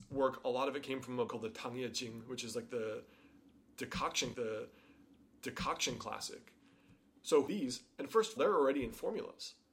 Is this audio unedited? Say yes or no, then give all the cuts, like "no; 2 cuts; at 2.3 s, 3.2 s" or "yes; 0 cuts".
no; 4 cuts; at 1.3 s, 4.3 s, 7.5 s, 8.4 s